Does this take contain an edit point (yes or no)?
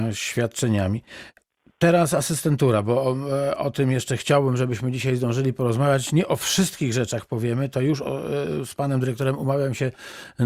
no